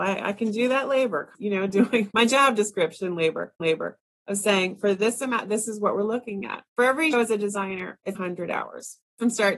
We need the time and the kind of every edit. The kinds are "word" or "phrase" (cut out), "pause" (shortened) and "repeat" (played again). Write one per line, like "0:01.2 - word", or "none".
0:01.3 - word
0:02.1 - word
0:03.6 - repeat
0:07.1 - word
0:08.1 - word